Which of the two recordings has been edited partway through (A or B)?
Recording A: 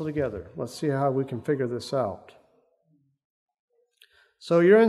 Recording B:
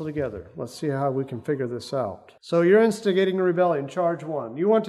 B